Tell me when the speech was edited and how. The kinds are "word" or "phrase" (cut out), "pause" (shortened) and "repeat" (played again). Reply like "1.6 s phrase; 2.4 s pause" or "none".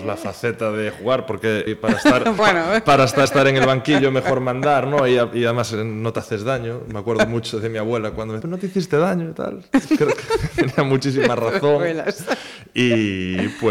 1.7 s phrase; 2.4 s word; 3.3 s repeat; 8.4 s word